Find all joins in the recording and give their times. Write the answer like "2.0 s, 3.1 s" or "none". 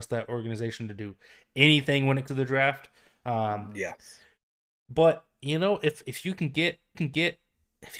2.3 s, 6.9 s